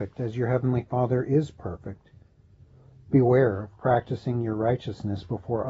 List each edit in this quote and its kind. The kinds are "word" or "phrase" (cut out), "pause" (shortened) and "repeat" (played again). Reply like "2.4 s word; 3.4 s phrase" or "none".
none